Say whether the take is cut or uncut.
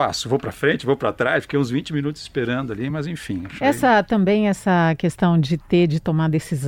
uncut